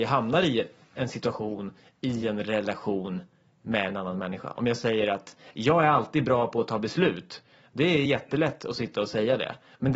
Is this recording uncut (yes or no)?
yes